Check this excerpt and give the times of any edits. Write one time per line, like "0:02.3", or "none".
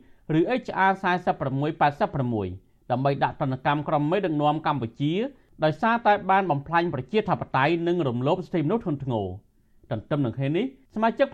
none

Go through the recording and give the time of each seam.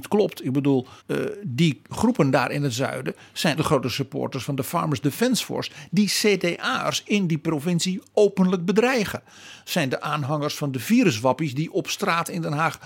0:01.0
0:01.9
0:03.6

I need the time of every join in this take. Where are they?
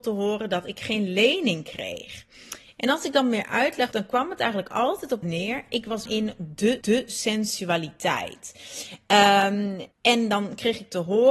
0:03.9
0:05.2
0:06.1
0:06.8
0:09.9

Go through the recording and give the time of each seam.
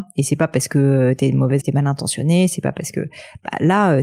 0:01.6

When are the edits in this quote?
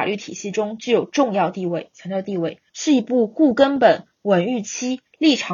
0:02.7

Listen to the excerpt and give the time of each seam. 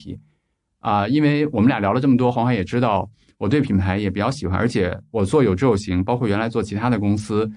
none

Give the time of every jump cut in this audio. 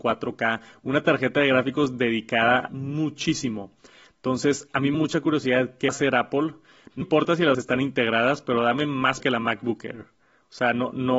0:02.7
0:04.9
0:05.9
0:07.0
0:07.5
0:09.2

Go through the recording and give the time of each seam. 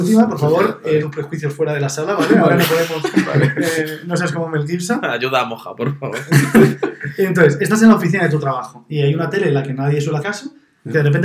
0:01.0
0:10.2

